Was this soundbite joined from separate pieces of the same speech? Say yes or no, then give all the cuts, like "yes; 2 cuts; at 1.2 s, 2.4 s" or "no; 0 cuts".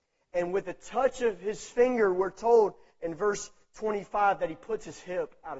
no; 0 cuts